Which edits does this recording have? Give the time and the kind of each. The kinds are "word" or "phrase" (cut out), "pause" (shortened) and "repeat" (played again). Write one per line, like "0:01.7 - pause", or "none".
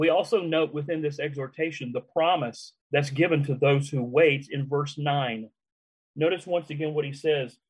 0:02.8 - pause